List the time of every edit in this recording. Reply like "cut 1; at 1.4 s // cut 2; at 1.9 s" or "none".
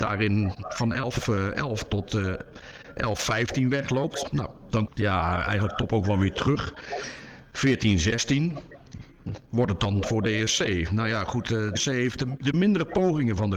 cut 1; at 4.9 s // cut 2; at 11.8 s